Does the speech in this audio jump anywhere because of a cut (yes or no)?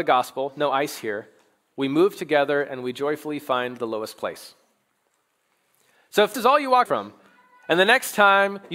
yes